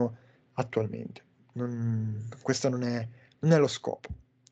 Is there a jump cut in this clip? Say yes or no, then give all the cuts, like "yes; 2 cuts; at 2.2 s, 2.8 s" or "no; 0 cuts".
no; 0 cuts